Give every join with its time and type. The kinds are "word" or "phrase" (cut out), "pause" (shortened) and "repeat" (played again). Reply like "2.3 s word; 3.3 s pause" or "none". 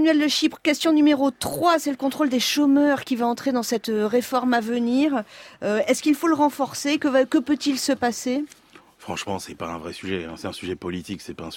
8.8 s pause